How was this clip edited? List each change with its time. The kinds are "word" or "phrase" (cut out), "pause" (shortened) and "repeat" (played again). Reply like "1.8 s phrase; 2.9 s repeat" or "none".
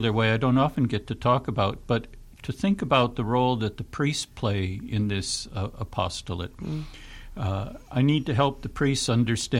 none

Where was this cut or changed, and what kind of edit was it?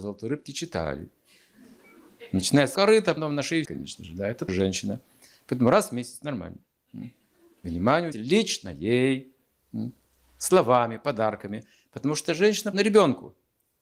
2.7 s word; 3.2 s word; 3.6 s word; 4.5 s word; 8.1 s word; 12.7 s word

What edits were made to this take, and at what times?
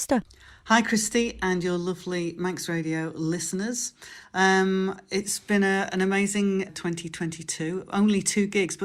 6.7 s word

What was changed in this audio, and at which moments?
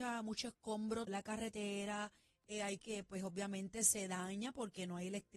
1.1 s word; 2.8 s word

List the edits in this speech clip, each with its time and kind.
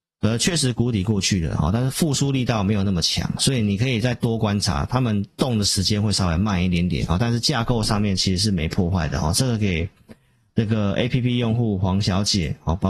none

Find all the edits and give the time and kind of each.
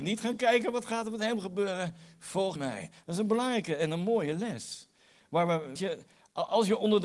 2.6 s word; 5.8 s word

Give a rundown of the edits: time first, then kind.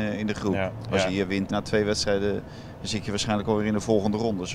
1.5 s phrase

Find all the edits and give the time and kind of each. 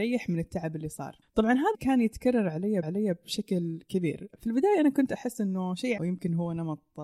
1.2 s pause; 1.7 s word; 2.8 s repeat; 6.0 s phrase

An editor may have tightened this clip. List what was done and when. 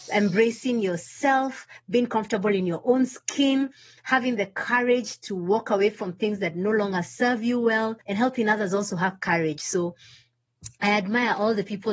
8.0 s pause

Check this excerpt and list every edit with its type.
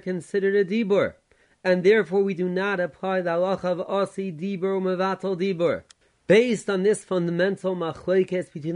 none

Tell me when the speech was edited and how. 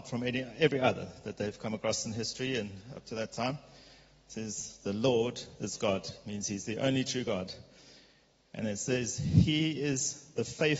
none

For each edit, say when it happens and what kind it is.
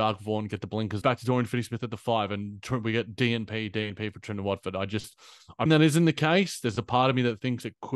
1.0 s phrase; 3.7 s word; 5.7 s word

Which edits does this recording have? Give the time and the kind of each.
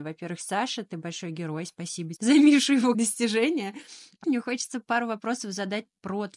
2.2 s word; 2.9 s word; 4.2 s word

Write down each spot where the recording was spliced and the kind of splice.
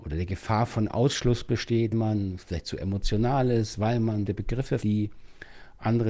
1.9 s word; 4.3 s word; 4.8 s word

